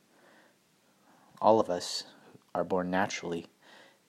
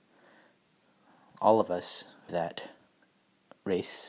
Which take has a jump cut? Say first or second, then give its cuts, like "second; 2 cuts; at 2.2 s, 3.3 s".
second; 1 cut; at 2.3 s